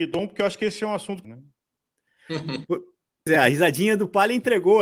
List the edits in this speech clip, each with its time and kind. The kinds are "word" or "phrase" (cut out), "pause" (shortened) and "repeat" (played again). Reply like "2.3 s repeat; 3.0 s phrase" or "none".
1.2 s phrase; 3.3 s word